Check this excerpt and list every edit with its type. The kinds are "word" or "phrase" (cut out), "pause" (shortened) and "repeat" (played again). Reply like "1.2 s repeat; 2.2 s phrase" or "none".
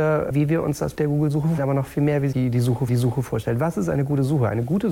0.9 s word; 1.6 s word; 2.3 s phrase; 2.9 s repeat